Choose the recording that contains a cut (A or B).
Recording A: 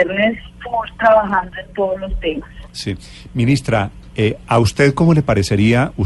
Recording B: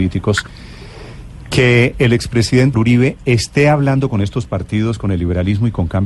B